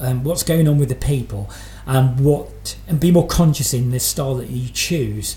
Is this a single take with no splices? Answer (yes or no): yes